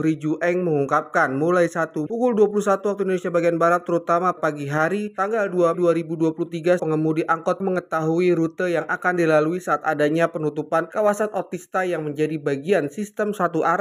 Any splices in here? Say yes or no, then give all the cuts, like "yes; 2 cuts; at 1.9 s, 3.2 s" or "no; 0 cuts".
yes; 5 cuts; at 2.1 s, 4.4 s, 5.7 s, 6.8 s, 7.6 s